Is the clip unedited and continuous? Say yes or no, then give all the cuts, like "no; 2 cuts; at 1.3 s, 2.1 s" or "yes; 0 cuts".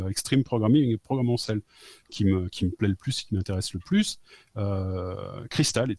yes; 0 cuts